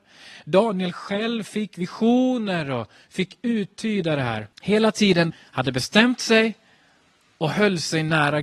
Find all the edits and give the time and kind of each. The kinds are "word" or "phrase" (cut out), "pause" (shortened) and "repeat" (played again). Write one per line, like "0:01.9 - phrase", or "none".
0:04.5 - pause
0:05.3 - phrase